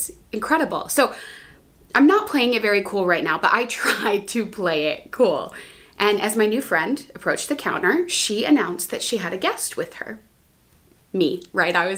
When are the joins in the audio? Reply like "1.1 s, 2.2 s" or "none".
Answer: none